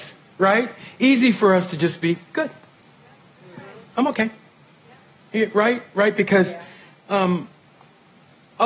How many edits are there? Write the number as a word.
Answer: zero